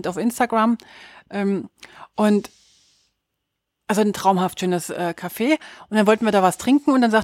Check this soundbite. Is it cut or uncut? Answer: uncut